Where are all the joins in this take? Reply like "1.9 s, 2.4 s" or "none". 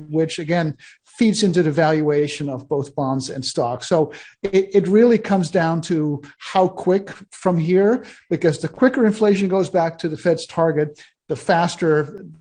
none